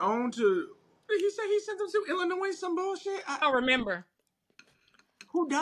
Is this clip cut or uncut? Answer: cut